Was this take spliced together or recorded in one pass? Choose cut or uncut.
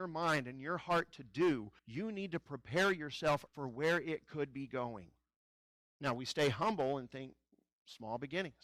cut